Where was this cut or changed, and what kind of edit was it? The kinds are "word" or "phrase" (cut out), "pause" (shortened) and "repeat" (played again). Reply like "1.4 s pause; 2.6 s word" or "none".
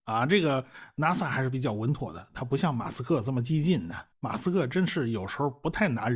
4.1 s pause